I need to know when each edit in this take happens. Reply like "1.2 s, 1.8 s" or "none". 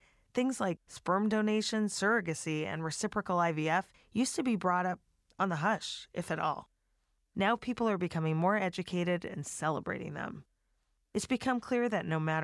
none